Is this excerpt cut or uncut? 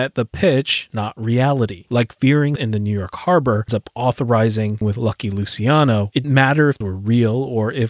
cut